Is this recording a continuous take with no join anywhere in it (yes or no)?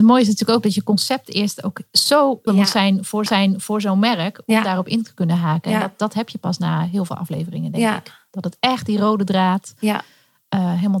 no